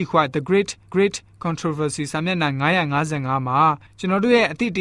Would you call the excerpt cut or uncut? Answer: cut